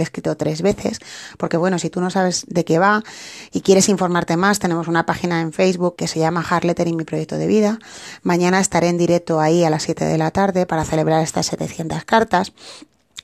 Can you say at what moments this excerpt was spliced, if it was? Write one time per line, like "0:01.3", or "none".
0:06.0